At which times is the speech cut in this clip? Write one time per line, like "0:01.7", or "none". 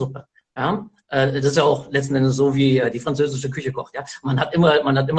none